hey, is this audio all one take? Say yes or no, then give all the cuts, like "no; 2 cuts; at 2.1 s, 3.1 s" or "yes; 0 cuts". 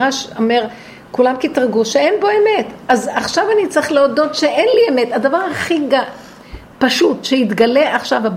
yes; 0 cuts